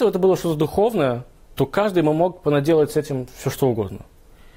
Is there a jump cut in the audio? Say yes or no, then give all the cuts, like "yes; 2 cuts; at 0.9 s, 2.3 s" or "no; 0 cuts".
no; 0 cuts